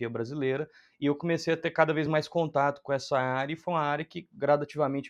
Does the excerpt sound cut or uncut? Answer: uncut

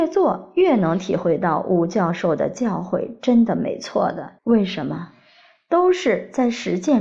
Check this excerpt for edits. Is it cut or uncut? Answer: cut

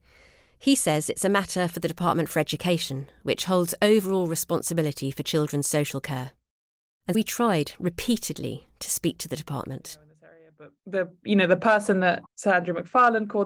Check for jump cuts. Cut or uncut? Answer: cut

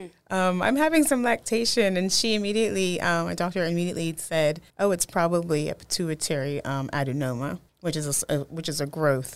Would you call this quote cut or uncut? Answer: cut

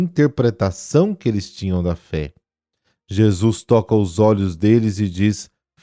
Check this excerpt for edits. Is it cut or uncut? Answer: uncut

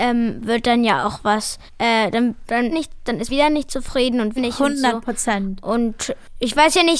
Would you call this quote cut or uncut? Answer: cut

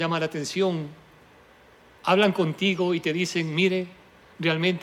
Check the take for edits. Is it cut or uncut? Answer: uncut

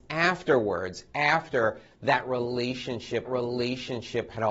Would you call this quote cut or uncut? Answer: cut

